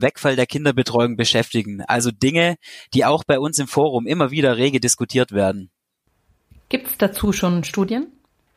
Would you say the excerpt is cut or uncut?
uncut